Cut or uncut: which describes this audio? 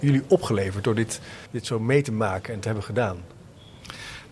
cut